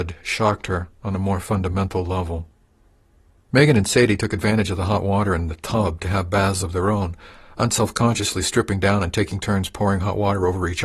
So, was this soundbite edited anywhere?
no; 0 cuts

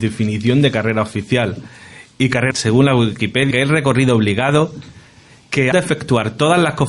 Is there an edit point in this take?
yes; 3 cuts; at 2.5 s, 3.5 s, 5.7 s

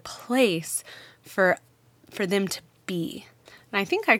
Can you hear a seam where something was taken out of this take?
no; 0 cuts

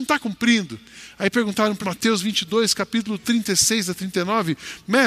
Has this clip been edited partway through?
yes; 1 cut; at 1.8 s

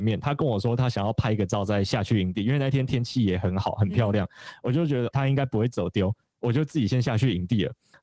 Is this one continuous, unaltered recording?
no; 1 cut; at 5.1 s

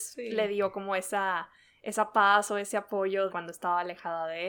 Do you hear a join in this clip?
yes; 1 cut; at 3.3 s

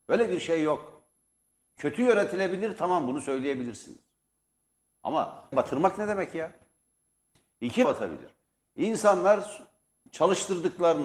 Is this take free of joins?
no; 2 cuts; at 5.5 s, 7.8 s

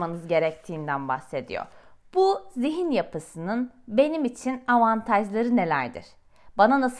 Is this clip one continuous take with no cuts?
yes; 0 cuts

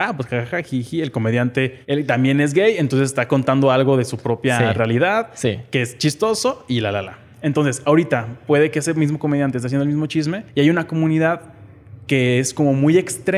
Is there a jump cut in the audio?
yes; 2 cuts; at 1.8 s, 10.5 s

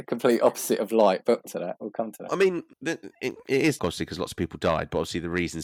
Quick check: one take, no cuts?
no; 4 cuts; at 1.5 s, 2.3 s, 2.7 s, 3.8 s

